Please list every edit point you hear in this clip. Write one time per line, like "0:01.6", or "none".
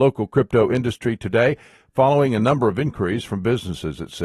none